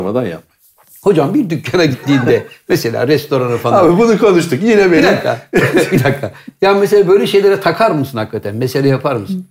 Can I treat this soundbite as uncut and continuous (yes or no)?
yes